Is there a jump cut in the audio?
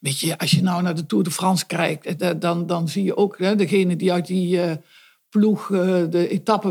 no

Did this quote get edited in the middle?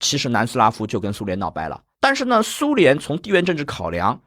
yes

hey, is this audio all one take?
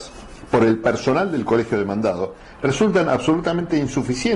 yes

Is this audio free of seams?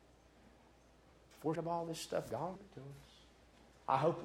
no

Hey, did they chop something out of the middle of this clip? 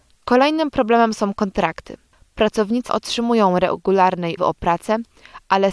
yes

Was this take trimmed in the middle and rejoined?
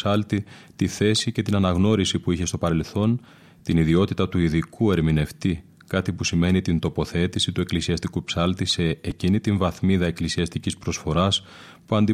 no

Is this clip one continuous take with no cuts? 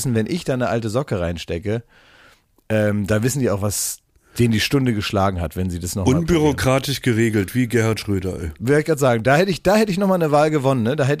yes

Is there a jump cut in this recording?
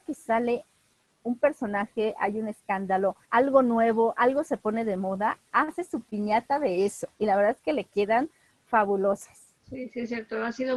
yes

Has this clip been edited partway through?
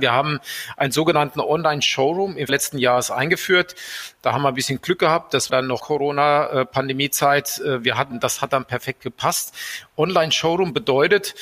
yes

